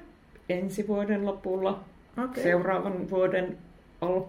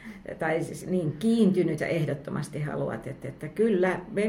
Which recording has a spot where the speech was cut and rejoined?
second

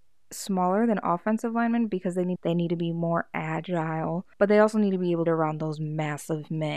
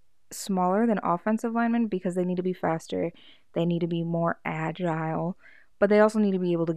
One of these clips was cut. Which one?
first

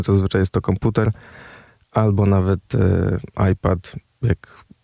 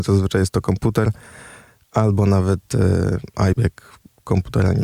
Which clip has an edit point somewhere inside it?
second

